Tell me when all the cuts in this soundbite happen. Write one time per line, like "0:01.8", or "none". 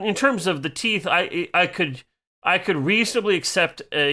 none